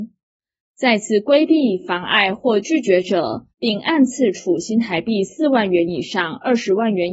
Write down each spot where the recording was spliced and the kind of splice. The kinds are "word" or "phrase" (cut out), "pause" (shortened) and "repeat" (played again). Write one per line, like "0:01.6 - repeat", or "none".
0:03.5 - pause